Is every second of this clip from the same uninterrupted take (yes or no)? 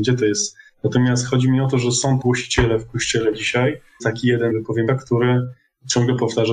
no